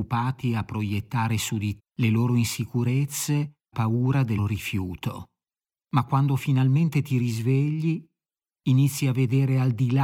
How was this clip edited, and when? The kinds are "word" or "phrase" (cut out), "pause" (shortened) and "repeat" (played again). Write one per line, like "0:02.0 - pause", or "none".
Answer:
0:01.8 - word
0:03.7 - phrase
0:04.4 - word
0:05.7 - pause